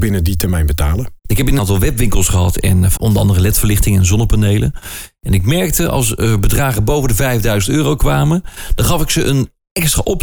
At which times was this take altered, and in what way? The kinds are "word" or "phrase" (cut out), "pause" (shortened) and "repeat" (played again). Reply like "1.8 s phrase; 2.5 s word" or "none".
1.2 s pause; 1.6 s phrase; 3.0 s word